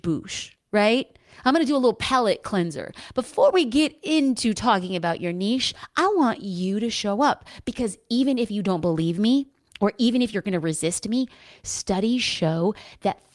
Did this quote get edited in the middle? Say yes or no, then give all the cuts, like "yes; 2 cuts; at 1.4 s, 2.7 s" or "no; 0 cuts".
no; 0 cuts